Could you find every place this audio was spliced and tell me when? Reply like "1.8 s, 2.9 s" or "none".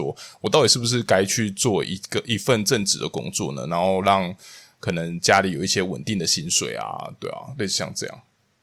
none